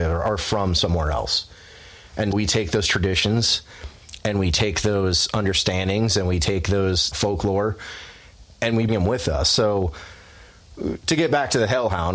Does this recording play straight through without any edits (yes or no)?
no